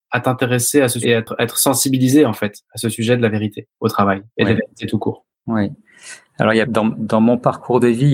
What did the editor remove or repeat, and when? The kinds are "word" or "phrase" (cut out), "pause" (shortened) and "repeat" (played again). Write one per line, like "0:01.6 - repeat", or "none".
0:01.0 - word
0:04.3 - pause
0:05.3 - pause
0:06.6 - phrase